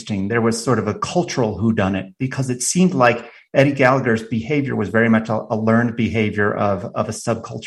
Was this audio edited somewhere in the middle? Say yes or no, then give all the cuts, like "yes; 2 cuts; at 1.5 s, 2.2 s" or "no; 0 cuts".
no; 0 cuts